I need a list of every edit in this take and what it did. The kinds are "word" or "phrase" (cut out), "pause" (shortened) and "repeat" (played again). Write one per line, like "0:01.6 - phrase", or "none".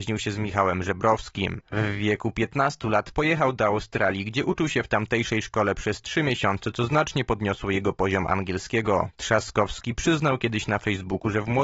none